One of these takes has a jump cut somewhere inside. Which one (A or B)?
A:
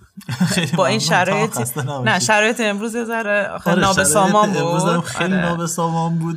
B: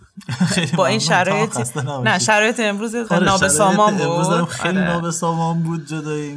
B